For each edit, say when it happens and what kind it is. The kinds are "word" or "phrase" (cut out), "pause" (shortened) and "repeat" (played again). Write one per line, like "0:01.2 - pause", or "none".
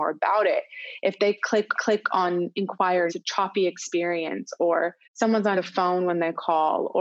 0:01.7 - repeat
0:03.1 - phrase
0:05.0 - pause
0:05.5 - word